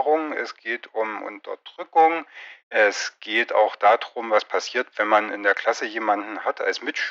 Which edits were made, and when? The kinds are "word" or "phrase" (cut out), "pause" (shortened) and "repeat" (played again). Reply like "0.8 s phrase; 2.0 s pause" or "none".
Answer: 2.6 s pause